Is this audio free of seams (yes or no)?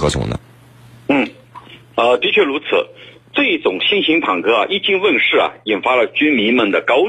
yes